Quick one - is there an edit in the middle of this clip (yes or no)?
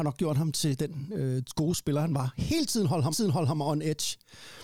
yes